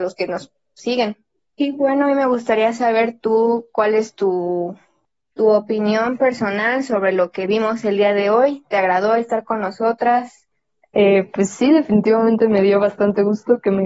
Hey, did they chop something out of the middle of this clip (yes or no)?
no